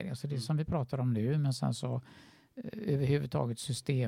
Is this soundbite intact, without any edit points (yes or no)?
yes